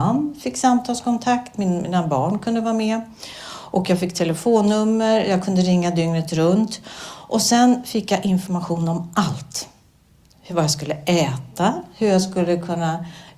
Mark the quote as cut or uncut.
uncut